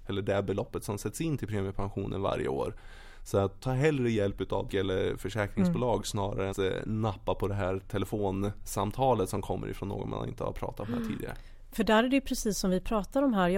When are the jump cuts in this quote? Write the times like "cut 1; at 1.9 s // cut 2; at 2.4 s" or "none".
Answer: cut 1; at 3.6 s // cut 2; at 4.7 s // cut 3; at 6.5 s

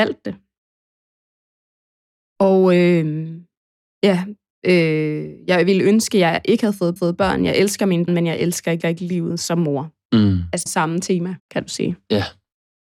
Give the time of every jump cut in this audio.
cut 1; at 3.7 s // cut 2; at 7.0 s // cut 3; at 8.1 s // cut 4; at 8.8 s // cut 5; at 10.7 s // cut 6; at 11.4 s

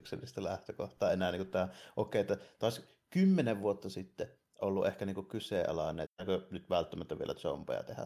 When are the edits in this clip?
cut 1; at 6.1 s

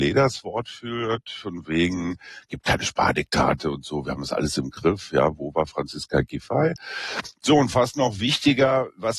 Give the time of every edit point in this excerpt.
none

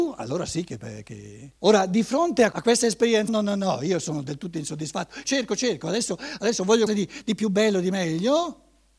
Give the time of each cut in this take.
cut 1; at 1.6 s // cut 2; at 2.5 s // cut 3; at 3.3 s // cut 4; at 5.2 s // cut 5; at 6.9 s

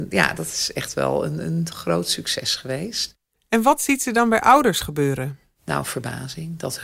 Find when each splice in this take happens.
none

